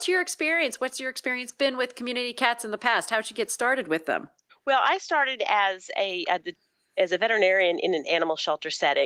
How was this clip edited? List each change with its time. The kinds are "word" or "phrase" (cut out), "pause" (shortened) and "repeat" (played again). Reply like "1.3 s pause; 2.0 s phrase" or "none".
none